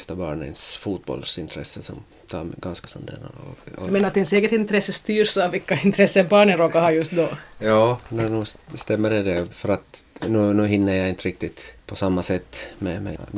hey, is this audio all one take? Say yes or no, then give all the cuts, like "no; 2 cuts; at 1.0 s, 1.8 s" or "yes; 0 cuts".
no; 1 cut; at 2.8 s